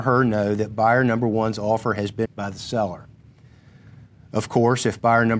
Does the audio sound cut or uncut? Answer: cut